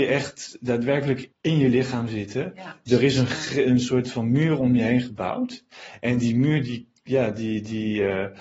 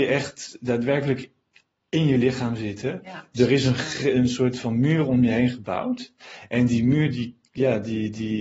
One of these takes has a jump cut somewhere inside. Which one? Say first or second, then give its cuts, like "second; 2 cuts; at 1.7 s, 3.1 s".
first; 1 cut; at 1.3 s